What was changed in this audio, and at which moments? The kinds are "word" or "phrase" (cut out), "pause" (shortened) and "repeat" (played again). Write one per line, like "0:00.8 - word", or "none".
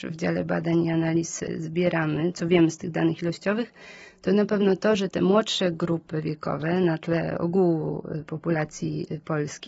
0:02.3 - word